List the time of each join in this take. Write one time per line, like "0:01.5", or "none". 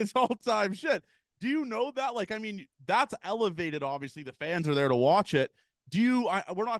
none